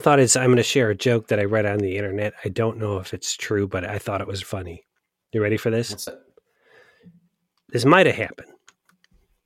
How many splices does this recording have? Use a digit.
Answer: 2